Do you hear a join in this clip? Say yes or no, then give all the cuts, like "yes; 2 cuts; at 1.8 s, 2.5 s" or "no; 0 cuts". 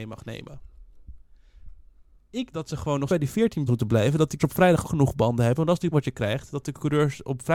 yes; 6 cuts; at 2.5 s, 3.1 s, 3.7 s, 4.4 s, 4.8 s, 5.9 s